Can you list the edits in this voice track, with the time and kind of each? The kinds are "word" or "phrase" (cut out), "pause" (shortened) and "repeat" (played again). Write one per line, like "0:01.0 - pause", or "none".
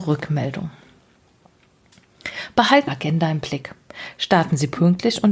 0:02.9 - phrase